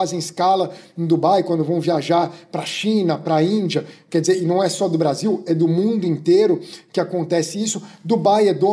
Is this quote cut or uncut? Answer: uncut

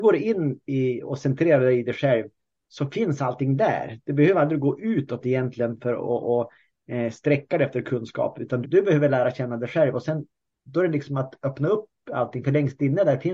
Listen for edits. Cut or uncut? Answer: cut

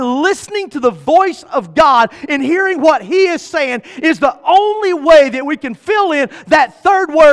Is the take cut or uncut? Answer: uncut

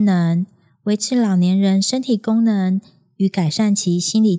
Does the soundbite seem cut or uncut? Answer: uncut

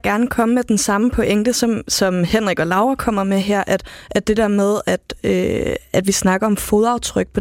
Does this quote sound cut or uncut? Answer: uncut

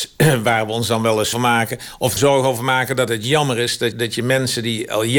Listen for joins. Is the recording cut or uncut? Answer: cut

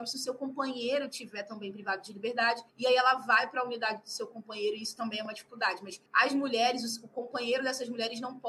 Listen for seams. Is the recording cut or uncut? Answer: cut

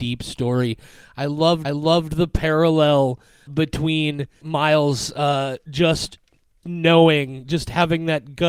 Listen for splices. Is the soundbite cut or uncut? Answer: cut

